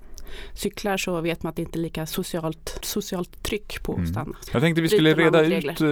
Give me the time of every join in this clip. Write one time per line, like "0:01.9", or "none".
0:02.8
0:04.5